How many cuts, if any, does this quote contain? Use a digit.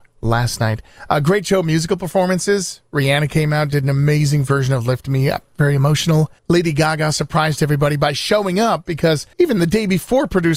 2